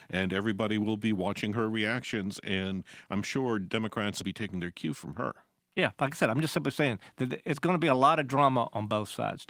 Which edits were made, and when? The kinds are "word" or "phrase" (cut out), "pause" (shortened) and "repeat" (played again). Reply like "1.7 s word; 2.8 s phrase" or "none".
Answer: 4.2 s phrase; 5.9 s pause